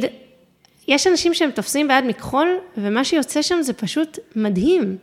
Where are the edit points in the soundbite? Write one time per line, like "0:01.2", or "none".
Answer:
none